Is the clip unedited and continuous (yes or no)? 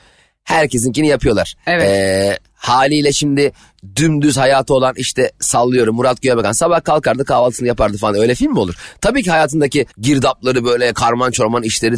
no